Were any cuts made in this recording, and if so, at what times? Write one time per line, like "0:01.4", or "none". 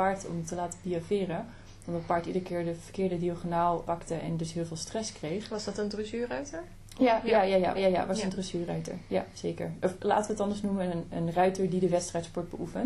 0:03.9
0:07.7
0:11.1